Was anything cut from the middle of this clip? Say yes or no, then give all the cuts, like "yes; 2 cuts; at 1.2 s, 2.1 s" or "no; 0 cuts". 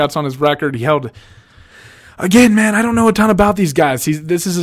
no; 0 cuts